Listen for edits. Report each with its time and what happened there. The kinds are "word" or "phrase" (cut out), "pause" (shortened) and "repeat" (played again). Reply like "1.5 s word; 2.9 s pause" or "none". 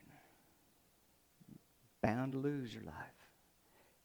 none